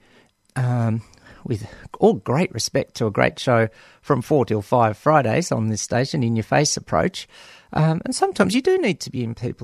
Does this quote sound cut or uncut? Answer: uncut